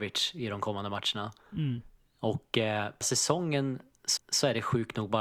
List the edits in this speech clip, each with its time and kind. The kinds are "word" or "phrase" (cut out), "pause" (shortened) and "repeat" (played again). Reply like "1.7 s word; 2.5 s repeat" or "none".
1.4 s pause; 3.0 s word; 4.2 s repeat